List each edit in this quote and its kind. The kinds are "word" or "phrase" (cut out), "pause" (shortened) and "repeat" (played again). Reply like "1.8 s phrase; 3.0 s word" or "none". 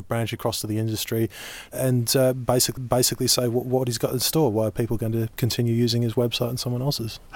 2.8 s repeat